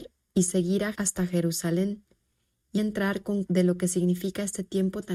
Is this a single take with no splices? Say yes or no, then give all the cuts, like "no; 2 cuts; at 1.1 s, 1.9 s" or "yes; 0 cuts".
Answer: no; 3 cuts; at 0.9 s, 2.8 s, 3.5 s